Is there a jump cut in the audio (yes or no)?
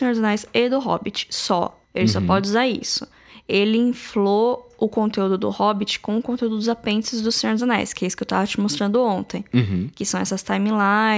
yes